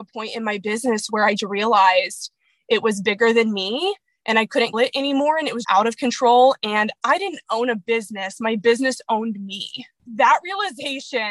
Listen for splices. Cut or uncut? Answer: cut